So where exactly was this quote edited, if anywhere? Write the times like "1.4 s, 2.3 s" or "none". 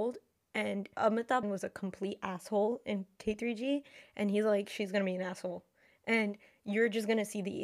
1.4 s